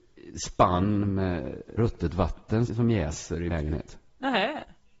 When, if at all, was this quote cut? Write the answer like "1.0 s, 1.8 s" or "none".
1.8 s, 2.7 s, 3.5 s